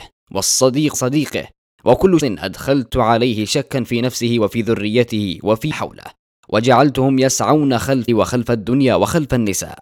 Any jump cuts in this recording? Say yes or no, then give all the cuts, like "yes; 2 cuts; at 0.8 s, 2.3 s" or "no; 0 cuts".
yes; 4 cuts; at 0.9 s, 2.2 s, 5.7 s, 8.1 s